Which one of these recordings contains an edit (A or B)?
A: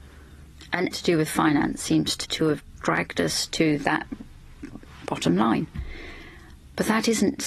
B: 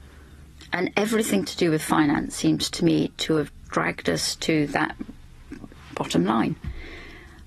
A